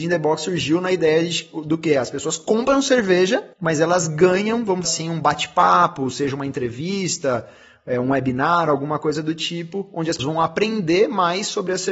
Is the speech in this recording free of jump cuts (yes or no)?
no